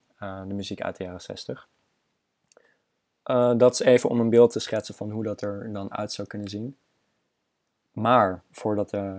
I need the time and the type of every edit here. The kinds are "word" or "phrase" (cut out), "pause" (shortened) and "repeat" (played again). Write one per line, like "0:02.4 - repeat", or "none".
none